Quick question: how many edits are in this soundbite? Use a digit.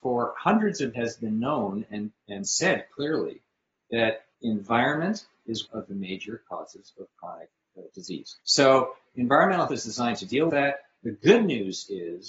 7